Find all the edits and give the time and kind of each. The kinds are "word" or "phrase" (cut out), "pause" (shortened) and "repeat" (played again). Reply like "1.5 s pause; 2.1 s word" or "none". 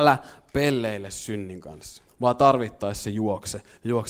2.1 s pause